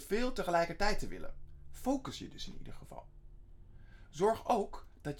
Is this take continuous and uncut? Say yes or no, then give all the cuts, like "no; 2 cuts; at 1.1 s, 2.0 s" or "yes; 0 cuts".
yes; 0 cuts